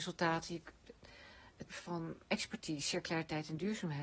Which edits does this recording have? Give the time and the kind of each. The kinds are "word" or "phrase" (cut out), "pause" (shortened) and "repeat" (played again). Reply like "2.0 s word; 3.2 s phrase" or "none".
1.7 s word; 2.3 s word

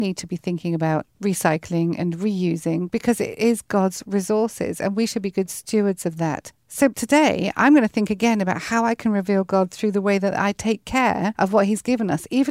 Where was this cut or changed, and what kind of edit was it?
none

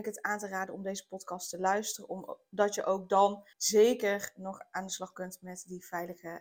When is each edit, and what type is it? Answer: 3.5 s pause

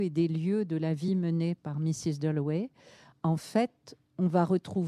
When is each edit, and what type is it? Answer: none

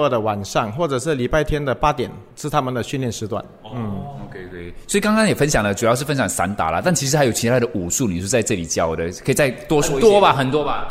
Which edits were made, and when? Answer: 2.3 s pause

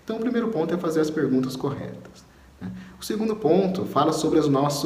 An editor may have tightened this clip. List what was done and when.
none

